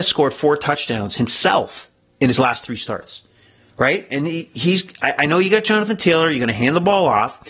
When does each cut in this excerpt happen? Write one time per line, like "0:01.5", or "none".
none